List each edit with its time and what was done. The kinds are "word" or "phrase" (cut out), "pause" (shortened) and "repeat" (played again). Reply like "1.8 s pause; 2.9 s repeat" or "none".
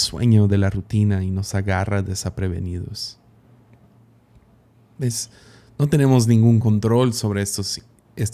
none